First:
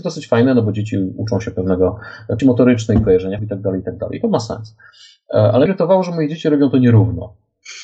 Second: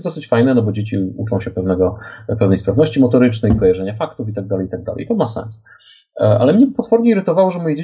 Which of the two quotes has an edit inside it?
first; 3 cuts; at 2.4 s, 3.4 s, 5.7 s

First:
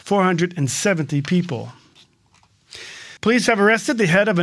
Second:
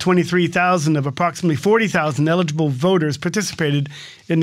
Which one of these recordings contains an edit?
first; 1 cut; at 3.2 s

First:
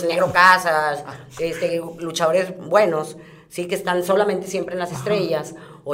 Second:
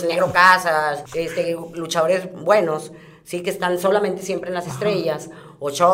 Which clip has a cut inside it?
second; 1 cut; at 1.1 s

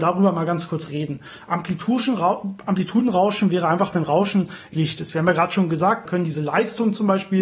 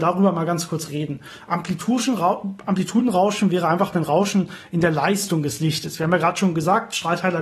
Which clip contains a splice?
first; 2 cuts; at 4.7 s, 6.1 s

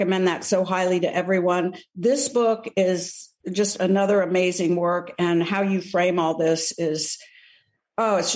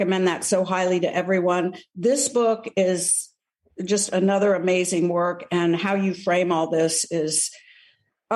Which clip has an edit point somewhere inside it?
first; 1 cut; at 3.4 s

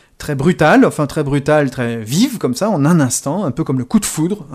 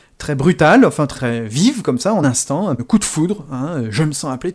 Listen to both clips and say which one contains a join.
second; 3 cuts; at 1.1 s, 2.2 s, 2.8 s

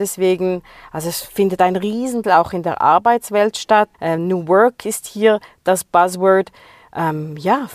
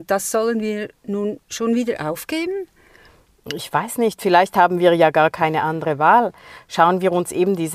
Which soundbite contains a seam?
first; 2 cuts; at 2.2 s, 3.9 s

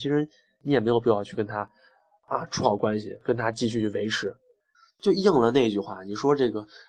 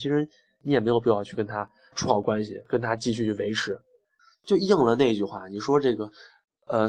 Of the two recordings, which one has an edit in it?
second; 1 cut; at 1.9 s

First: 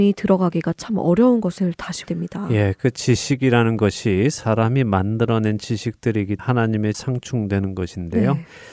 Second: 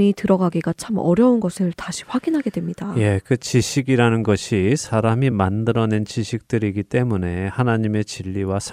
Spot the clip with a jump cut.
first; 3 cuts; at 2.1 s, 6.4 s, 6.9 s

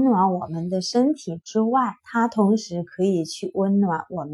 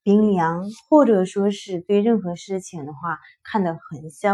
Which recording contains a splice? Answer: first; 1 cut; at 2.0 s

